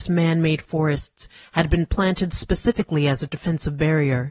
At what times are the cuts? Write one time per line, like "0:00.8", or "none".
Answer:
none

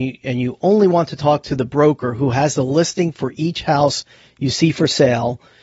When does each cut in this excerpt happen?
none

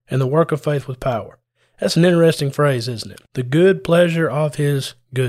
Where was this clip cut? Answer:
0:03.3

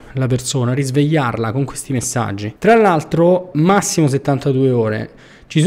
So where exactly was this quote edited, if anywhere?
0:02.6
0:03.5

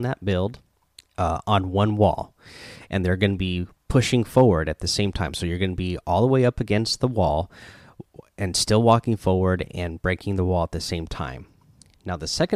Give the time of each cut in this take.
0:01.0

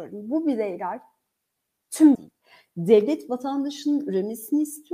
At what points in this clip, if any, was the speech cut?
0:02.1

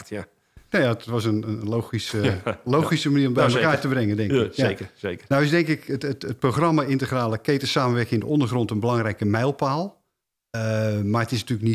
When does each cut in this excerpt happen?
none

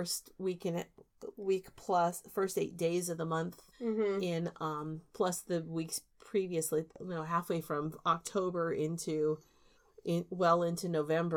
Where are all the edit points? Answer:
0:03.7
0:09.7

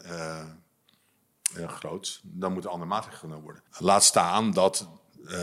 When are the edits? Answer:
0:03.7

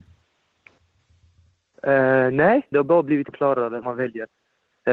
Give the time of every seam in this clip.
0:02.7
0:03.3
0:03.8

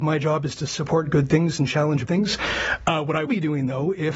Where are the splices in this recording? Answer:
0:02.1
0:03.3

